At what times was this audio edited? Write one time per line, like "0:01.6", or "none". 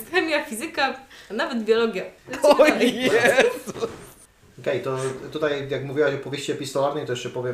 0:02.2
0:04.3